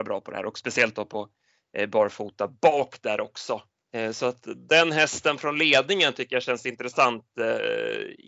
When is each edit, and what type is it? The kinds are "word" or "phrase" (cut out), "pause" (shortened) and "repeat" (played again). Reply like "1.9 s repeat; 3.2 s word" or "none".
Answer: none